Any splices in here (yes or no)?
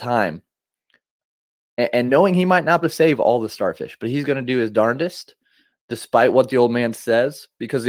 yes